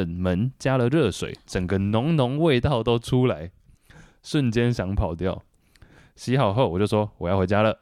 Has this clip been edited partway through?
no; 0 cuts

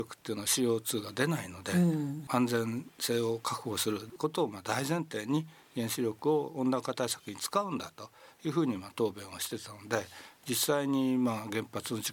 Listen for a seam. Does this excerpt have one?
no; 0 cuts

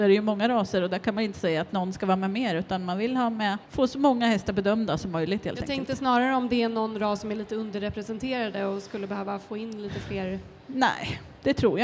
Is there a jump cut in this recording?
yes; 1 cut; at 3.6 s

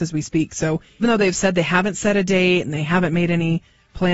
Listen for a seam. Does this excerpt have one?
yes; 1 cut; at 1.0 s

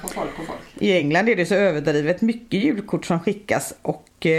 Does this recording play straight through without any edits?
yes; 0 cuts

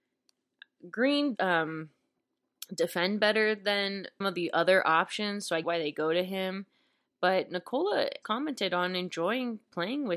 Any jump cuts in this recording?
yes; 4 cuts; at 1.4 s, 4.2 s, 5.6 s, 8.2 s

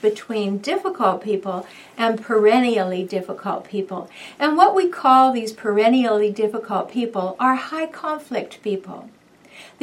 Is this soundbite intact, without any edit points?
yes; 0 cuts

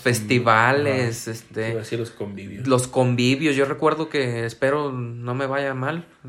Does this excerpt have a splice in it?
no; 0 cuts

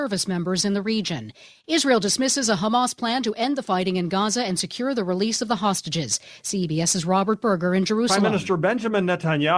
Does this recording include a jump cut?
no; 0 cuts

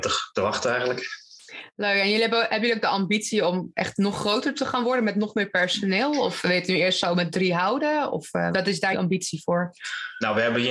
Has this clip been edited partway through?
yes; 2 cuts; at 8.5 s, 8.9 s

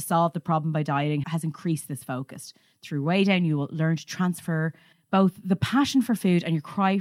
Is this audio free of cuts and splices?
no; 2 cuts; at 1.2 s, 4.9 s

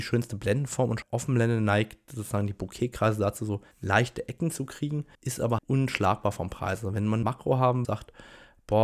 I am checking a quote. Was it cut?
yes; 6 cuts; at 1.0 s, 3.7 s, 5.1 s, 5.6 s, 7.2 s, 7.8 s

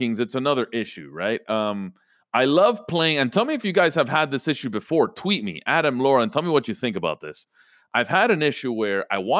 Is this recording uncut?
yes; 0 cuts

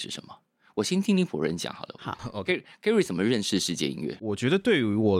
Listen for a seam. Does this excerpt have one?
no; 0 cuts

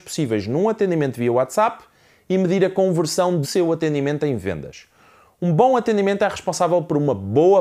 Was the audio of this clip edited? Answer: yes; 1 cut; at 3.4 s

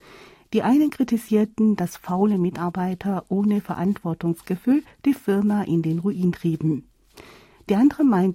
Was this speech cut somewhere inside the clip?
no; 0 cuts

